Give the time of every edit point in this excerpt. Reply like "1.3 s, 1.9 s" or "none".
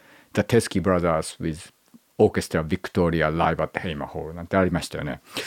none